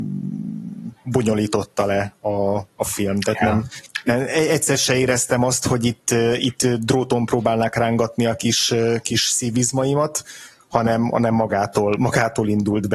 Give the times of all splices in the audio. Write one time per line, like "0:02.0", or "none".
none